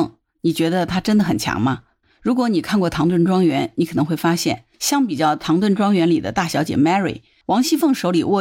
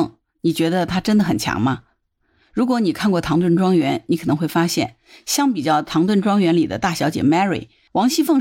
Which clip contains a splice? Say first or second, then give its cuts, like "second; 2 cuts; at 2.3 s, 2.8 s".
first; 2 cuts; at 2.0 s, 4.7 s